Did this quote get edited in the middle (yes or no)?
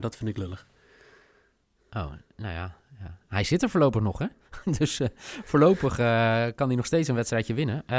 no